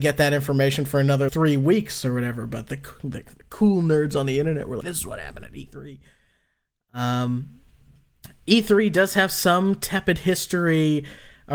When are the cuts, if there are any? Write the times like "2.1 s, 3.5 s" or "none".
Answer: 1.3 s, 4.8 s

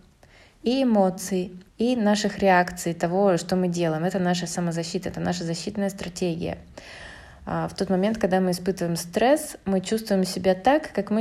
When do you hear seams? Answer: 1.7 s

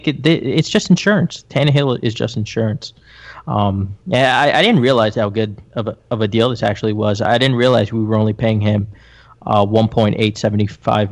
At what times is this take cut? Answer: none

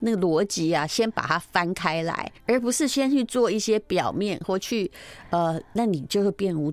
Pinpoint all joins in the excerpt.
2.4 s

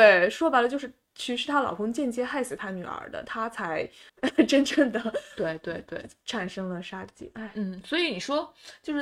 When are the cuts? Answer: 4.1 s

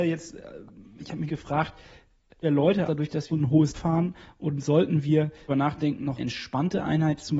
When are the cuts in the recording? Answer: 1.3 s, 2.4 s, 2.9 s, 3.3 s, 3.7 s, 5.5 s, 6.2 s

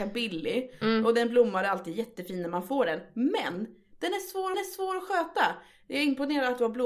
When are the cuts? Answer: 4.5 s

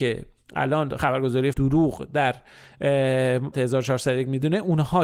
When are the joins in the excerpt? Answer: 1.5 s, 3.5 s

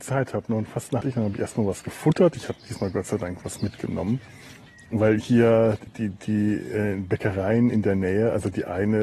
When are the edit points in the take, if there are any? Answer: 1.0 s, 5.9 s

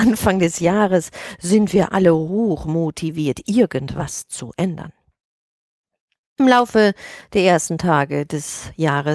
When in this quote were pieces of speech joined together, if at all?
none

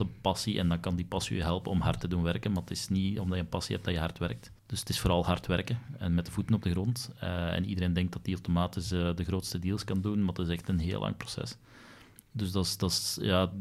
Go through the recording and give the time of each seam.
4.6 s

